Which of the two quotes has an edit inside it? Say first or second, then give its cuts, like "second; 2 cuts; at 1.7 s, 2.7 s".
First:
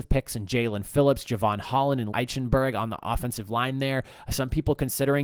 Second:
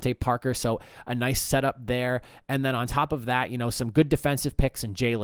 first; 1 cut; at 2.1 s